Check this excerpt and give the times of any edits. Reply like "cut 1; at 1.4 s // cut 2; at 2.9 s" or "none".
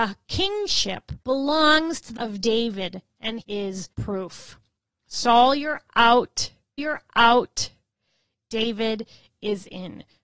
cut 1; at 1.2 s // cut 2; at 2.2 s // cut 3; at 3.4 s // cut 4; at 3.9 s // cut 5; at 6.8 s